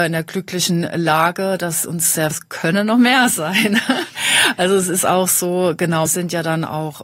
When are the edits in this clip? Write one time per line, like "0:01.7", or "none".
0:02.3
0:06.1